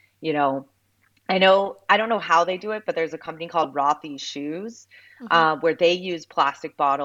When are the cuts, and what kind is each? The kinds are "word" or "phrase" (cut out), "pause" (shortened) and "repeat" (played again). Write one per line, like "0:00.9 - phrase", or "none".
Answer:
none